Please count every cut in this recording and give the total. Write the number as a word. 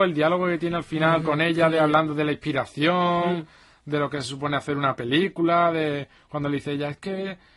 zero